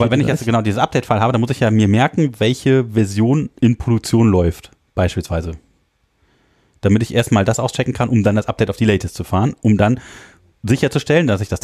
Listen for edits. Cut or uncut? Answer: uncut